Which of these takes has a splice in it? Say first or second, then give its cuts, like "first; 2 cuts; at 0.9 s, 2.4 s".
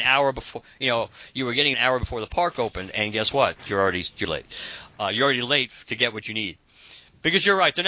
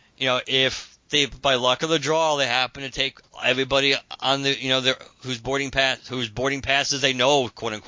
first; 2 cuts; at 1.7 s, 4.2 s